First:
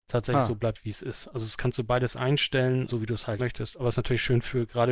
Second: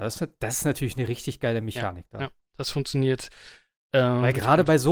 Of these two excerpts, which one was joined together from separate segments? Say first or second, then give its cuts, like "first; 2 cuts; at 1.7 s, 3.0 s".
first; 2 cuts; at 2.9 s, 3.4 s